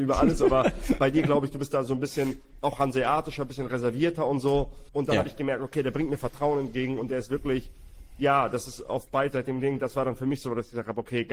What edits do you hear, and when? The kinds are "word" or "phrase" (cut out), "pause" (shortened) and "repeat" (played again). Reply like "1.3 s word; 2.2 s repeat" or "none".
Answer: 4.9 s pause